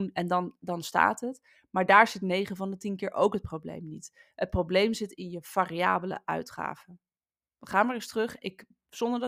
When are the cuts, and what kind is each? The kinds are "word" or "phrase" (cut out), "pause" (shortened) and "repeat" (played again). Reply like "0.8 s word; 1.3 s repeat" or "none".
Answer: none